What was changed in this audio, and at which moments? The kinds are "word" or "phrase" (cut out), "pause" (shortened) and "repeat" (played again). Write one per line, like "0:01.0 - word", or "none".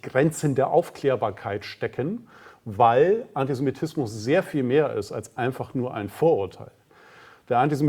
none